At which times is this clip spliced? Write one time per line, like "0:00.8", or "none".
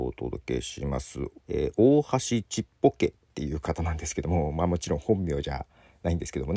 0:01.4